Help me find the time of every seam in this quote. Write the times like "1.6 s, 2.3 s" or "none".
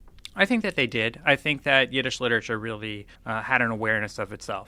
3.2 s